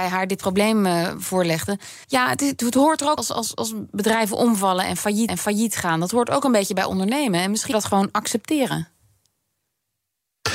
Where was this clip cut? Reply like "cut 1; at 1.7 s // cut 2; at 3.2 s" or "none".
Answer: cut 1; at 2.0 s // cut 2; at 3.2 s // cut 3; at 5.3 s // cut 4; at 7.7 s